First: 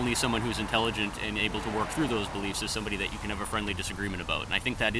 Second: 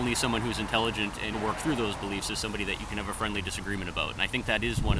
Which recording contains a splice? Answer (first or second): second